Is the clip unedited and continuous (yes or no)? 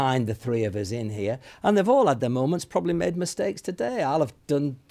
yes